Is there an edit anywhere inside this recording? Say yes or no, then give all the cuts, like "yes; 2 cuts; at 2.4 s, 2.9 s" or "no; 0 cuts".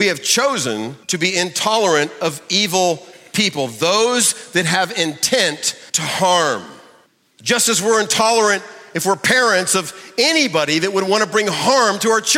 yes; 3 cuts; at 1.0 s, 5.9 s, 7.1 s